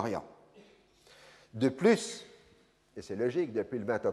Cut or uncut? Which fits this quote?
uncut